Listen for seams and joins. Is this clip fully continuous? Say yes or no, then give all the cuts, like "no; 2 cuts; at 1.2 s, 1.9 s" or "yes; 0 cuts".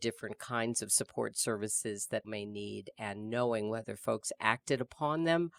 no; 1 cut; at 2.2 s